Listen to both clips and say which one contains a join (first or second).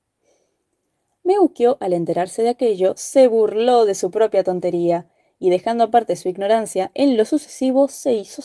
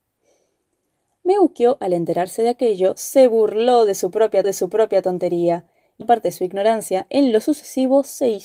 second